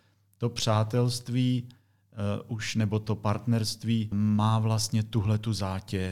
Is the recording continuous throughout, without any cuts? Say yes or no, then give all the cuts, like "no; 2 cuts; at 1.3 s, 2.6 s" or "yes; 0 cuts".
no; 1 cut; at 4.1 s